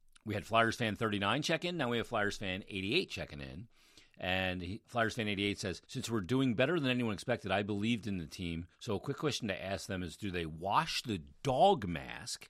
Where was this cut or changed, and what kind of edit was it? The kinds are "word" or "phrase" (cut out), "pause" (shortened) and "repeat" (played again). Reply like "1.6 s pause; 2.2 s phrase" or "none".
4.8 s word; 5.8 s pause; 8.7 s pause